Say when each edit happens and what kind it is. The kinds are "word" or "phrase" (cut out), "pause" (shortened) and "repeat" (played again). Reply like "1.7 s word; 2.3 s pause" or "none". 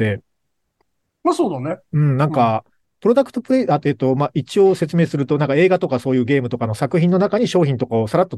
none